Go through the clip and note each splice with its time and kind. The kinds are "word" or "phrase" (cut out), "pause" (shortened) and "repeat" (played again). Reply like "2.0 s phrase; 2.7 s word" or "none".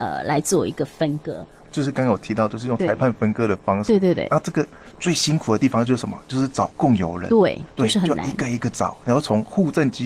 1.6 s phrase